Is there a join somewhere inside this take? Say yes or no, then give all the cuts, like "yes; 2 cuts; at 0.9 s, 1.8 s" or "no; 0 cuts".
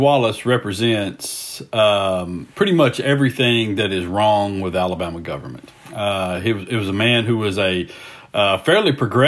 no; 0 cuts